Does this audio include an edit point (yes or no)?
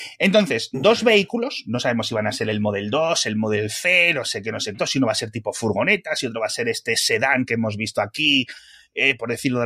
yes